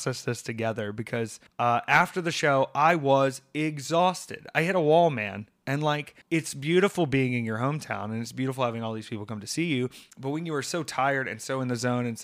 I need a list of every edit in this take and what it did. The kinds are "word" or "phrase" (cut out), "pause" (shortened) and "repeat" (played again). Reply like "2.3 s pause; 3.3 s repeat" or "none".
1.5 s pause; 6.2 s pause; 10.1 s pause

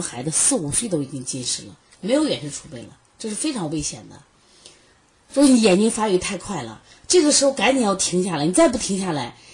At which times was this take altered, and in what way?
none

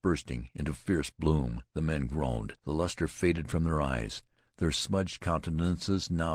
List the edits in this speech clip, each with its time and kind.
1.7 s pause; 2.6 s pause

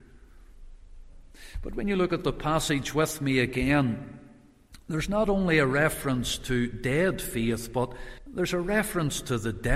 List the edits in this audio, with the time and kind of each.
8.2 s pause

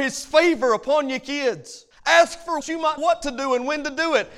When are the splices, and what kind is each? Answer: 1.9 s pause; 2.6 s phrase; 3.0 s word

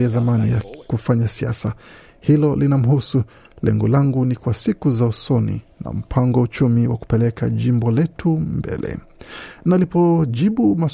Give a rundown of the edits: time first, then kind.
none

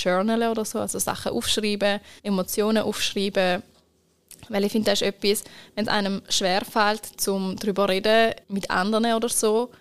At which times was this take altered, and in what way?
2.2 s pause; 8.4 s pause

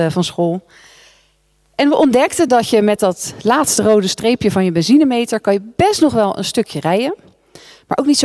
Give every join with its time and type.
none

